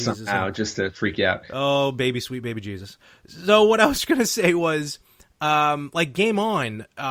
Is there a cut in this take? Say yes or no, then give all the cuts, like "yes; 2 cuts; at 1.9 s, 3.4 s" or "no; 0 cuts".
no; 0 cuts